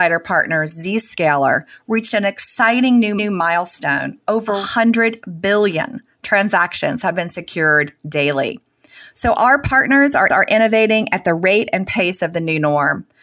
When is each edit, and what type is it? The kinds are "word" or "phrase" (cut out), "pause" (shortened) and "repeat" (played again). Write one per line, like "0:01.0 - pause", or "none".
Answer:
0:03.2 - repeat
0:10.3 - repeat